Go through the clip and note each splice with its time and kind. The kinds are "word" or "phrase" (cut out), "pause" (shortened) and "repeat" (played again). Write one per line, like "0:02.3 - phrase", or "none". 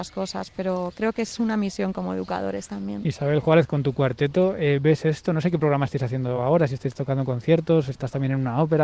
none